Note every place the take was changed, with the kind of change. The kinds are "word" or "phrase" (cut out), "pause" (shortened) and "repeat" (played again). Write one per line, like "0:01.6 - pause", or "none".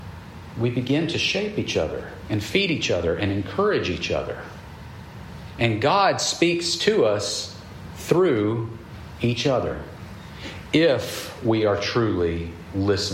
none